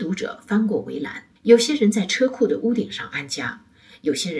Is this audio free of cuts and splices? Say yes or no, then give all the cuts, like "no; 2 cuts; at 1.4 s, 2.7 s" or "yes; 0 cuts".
no; 1 cut; at 1.4 s